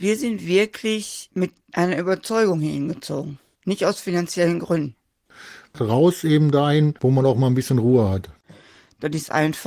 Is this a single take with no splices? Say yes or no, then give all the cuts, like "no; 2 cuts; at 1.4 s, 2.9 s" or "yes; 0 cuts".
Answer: yes; 0 cuts